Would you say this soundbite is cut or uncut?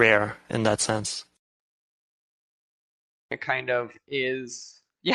uncut